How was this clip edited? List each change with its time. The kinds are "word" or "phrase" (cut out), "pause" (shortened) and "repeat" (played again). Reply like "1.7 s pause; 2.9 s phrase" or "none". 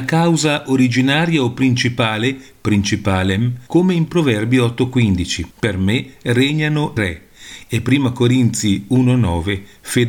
3.7 s pause; 5.5 s pause; 7.0 s word